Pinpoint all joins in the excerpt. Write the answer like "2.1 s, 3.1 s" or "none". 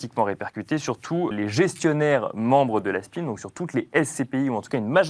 1.3 s